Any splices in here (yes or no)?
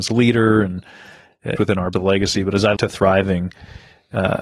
yes